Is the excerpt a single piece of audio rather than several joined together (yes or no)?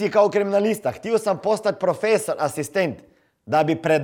yes